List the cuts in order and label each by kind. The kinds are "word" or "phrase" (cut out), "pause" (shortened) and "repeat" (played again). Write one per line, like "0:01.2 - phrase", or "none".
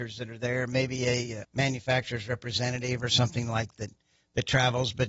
0:01.4 - word
0:03.7 - word